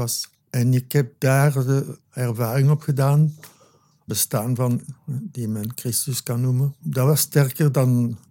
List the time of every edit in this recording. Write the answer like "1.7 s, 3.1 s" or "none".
4.1 s, 5.0 s